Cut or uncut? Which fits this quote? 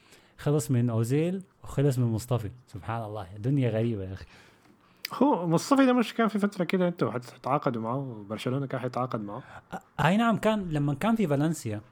cut